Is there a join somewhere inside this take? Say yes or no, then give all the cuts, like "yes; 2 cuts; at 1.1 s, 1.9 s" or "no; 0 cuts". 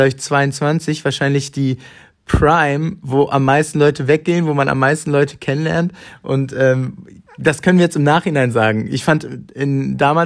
no; 0 cuts